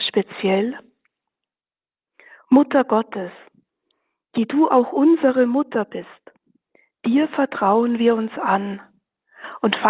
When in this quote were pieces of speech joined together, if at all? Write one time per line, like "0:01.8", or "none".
none